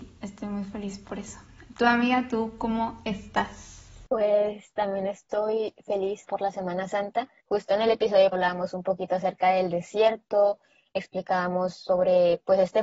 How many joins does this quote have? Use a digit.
4